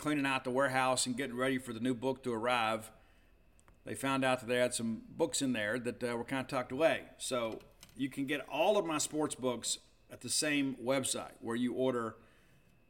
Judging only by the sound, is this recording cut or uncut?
uncut